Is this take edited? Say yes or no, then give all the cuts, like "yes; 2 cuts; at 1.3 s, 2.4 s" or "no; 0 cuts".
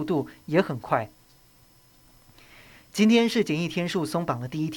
no; 0 cuts